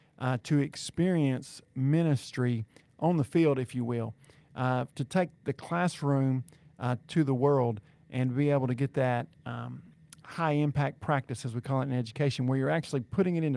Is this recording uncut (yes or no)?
yes